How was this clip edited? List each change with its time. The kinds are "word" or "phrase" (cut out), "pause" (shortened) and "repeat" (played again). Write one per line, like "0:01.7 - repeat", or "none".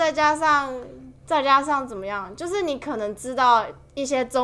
0:01.2 - pause